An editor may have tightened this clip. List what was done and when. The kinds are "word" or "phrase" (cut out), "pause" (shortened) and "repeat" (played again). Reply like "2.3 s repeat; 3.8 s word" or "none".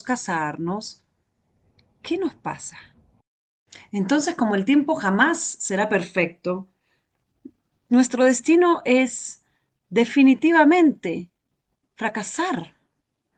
none